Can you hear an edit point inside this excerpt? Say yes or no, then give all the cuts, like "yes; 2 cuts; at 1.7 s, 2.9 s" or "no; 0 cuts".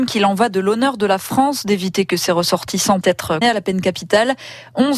yes; 2 cuts; at 3.0 s, 3.4 s